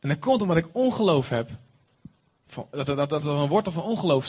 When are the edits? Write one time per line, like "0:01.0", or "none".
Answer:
none

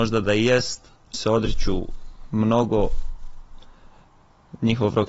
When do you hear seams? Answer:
0:01.1

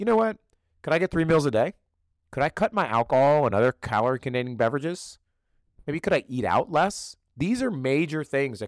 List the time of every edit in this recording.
none

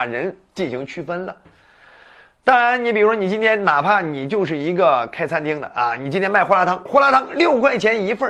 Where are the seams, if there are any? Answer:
0:06.9

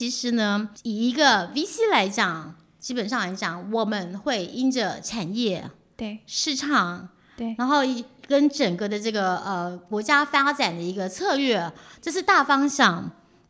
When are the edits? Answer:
none

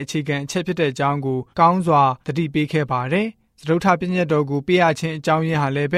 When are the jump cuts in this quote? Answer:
0:01.5
0:02.2

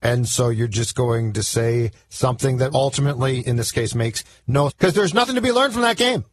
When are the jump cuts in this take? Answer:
0:02.7
0:04.7

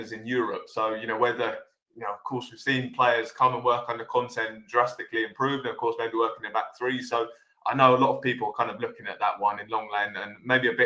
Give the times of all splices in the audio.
none

